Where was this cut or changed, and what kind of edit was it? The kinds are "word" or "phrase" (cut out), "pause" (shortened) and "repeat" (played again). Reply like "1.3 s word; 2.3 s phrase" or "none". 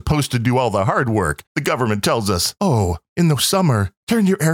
1.5 s pause; 2.6 s pause